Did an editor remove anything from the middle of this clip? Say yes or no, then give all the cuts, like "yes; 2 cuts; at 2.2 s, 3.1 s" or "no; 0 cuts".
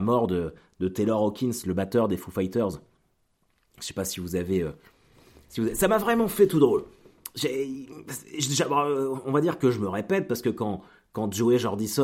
no; 0 cuts